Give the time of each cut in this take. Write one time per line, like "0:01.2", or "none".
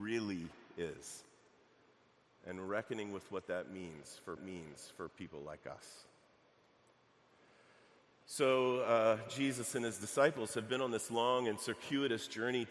0:04.4